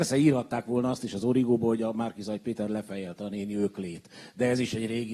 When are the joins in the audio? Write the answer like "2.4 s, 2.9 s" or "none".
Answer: none

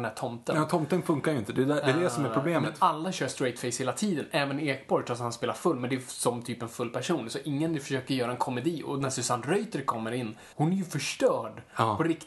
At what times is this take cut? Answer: 10.5 s

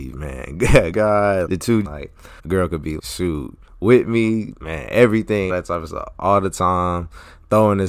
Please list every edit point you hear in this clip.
0.9 s, 1.5 s, 1.8 s, 2.4 s, 3.0 s, 5.5 s

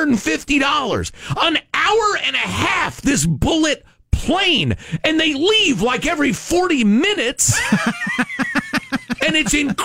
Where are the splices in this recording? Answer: none

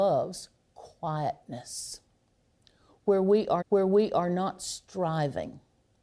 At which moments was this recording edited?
3.6 s

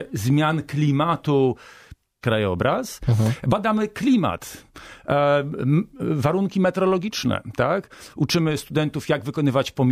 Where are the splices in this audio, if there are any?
2.2 s

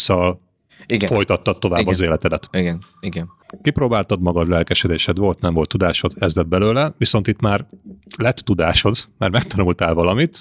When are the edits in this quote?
none

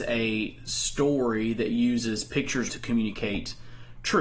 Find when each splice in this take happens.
2.7 s

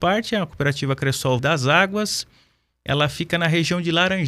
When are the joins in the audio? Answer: 1.4 s

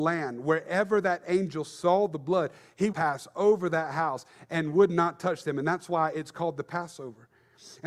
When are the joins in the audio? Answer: 2.9 s

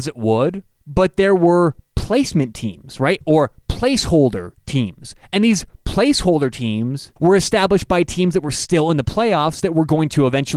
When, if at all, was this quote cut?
7.2 s

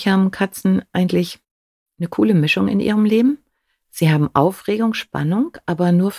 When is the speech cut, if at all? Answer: none

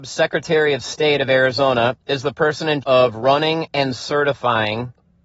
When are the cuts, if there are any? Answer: 2.8 s

